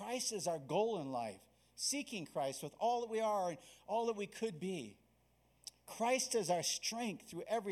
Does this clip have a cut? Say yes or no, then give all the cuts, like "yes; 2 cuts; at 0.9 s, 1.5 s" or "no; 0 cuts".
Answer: no; 0 cuts